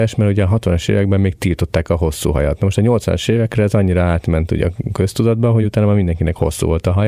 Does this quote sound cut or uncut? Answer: uncut